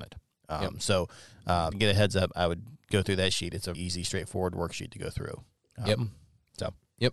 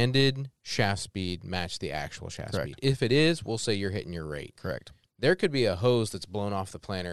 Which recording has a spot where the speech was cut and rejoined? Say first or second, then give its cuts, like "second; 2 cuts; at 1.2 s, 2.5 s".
first; 2 cuts; at 1.7 s, 3.7 s